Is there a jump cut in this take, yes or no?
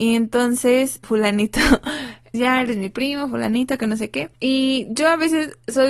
yes